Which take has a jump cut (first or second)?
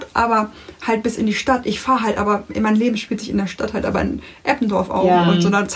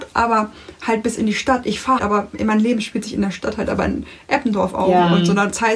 second